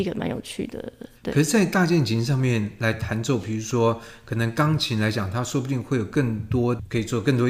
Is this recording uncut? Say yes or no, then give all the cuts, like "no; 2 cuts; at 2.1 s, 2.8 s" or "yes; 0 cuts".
no; 1 cut; at 1.2 s